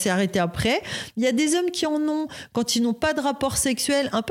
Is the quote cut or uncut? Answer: uncut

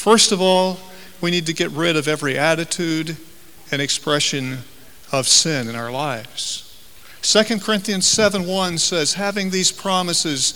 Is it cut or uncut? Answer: uncut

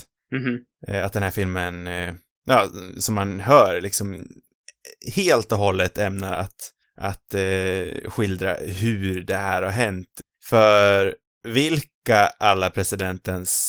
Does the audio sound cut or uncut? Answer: uncut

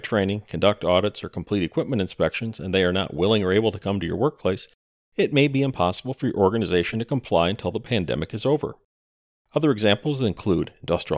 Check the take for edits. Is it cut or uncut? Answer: uncut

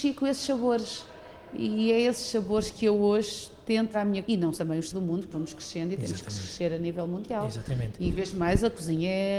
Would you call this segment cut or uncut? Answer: cut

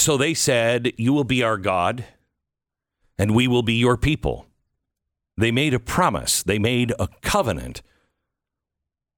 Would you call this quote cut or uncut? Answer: uncut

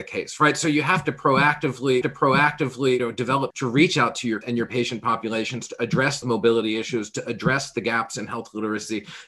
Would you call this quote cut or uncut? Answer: cut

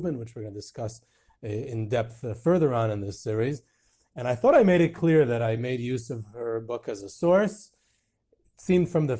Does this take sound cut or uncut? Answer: uncut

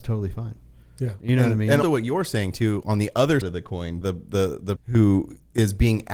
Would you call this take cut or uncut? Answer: cut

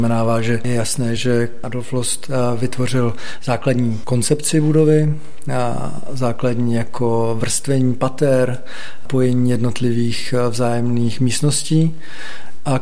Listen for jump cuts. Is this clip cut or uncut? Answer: uncut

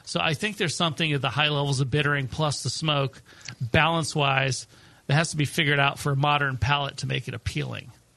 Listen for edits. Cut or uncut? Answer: uncut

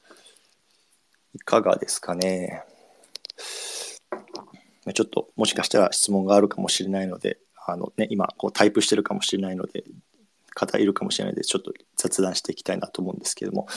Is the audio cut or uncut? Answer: uncut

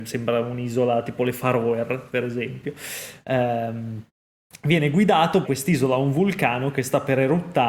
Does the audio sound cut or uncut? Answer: cut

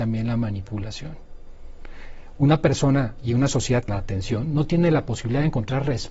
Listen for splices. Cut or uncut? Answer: cut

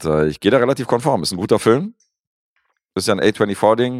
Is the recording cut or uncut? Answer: uncut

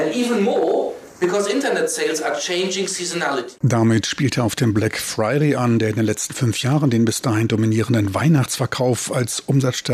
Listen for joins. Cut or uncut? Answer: cut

